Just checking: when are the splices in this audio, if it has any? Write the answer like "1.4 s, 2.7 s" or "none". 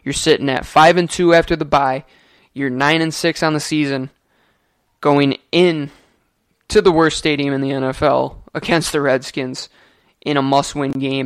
none

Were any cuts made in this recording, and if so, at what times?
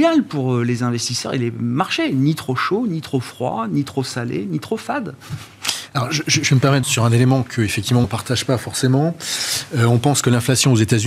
6.8 s, 8.0 s

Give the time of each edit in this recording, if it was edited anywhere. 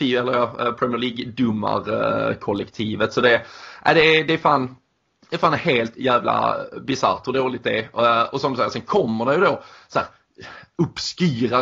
none

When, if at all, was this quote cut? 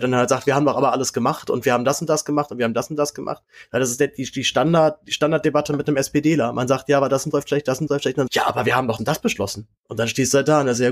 7.3 s, 7.9 s, 8.3 s, 9.0 s, 9.8 s

